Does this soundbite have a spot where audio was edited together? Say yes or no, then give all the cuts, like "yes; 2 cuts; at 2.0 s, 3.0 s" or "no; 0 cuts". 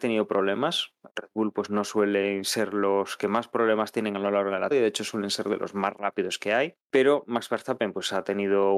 yes; 3 cuts; at 1.1 s, 4.7 s, 6.8 s